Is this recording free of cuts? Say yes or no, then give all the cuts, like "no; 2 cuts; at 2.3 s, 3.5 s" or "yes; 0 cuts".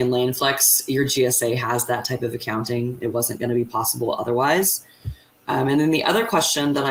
yes; 0 cuts